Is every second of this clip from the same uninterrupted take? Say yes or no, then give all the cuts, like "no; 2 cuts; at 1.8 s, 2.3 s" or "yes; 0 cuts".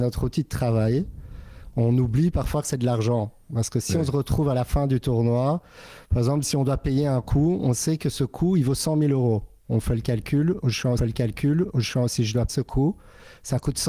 no; 2 cuts; at 11.0 s, 12.5 s